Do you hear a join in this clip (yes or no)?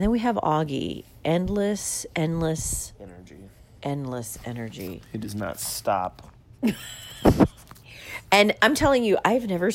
no